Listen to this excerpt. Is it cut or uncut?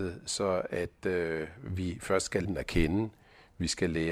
cut